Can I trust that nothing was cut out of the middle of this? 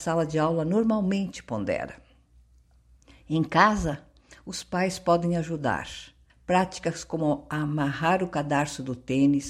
no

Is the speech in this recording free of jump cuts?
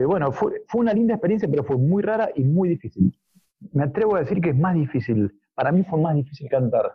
yes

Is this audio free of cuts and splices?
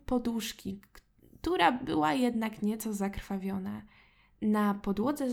yes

